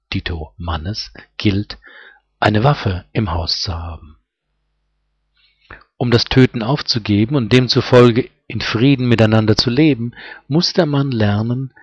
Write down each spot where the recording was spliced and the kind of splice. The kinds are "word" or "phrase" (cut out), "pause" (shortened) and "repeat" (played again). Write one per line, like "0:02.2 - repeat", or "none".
none